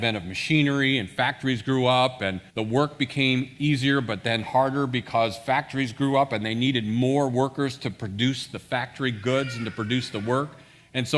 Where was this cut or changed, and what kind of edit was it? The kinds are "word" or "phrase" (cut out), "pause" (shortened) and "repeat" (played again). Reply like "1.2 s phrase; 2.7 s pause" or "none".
2.5 s pause